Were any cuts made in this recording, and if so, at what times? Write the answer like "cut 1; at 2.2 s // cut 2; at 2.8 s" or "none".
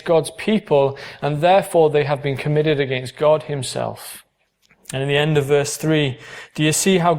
cut 1; at 4.5 s